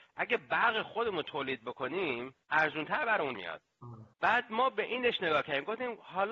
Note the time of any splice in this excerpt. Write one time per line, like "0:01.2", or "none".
0:02.4
0:03.3
0:04.1